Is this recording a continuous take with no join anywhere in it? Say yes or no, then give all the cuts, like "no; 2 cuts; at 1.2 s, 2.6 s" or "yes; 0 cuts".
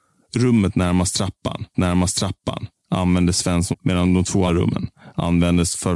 no; 3 cuts; at 1.7 s, 3.7 s, 4.5 s